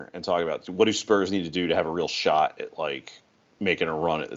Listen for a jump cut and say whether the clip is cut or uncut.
uncut